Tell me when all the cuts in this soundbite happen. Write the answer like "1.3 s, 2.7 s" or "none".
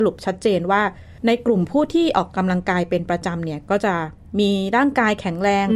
1.2 s

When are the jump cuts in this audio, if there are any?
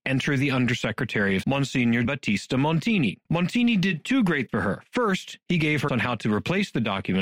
1.4 s, 2.0 s, 3.2 s, 4.5 s, 5.9 s

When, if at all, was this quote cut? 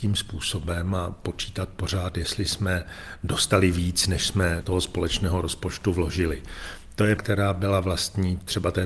4.6 s, 7.2 s

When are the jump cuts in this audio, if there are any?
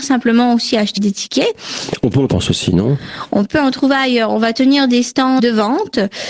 1.0 s, 2.3 s, 5.4 s

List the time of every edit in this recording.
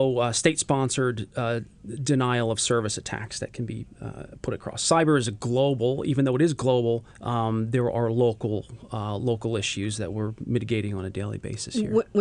7.1 s

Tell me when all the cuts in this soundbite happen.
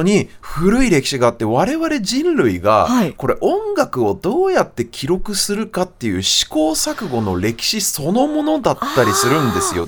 none

